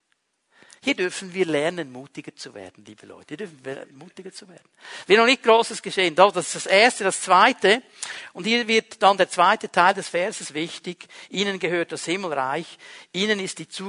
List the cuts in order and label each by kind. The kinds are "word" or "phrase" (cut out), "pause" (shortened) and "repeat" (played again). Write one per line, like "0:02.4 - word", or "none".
none